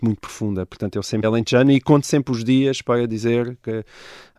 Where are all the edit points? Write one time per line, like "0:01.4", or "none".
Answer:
0:01.2